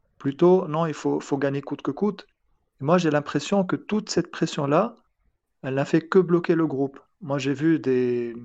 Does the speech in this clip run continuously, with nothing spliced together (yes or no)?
yes